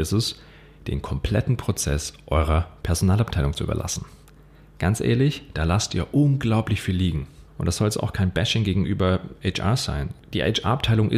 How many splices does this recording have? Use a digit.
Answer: 1